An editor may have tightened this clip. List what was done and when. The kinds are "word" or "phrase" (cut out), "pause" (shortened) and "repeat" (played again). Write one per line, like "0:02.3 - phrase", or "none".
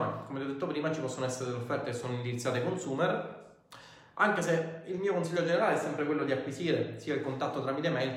none